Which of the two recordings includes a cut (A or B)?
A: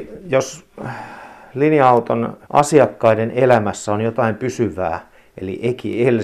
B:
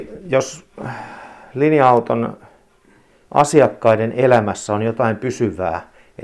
A